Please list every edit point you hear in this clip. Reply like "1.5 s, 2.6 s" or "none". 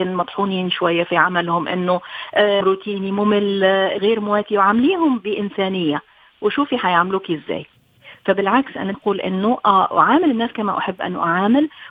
2.6 s, 4.0 s, 8.9 s